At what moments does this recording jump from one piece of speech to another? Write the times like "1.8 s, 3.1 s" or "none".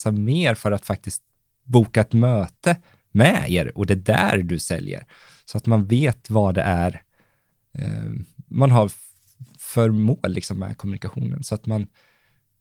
none